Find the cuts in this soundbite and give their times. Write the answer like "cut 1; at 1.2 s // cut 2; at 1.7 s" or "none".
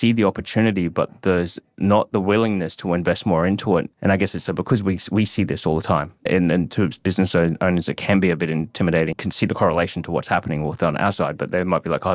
cut 1; at 3.9 s // cut 2; at 4.5 s // cut 3; at 6.3 s // cut 4; at 9.1 s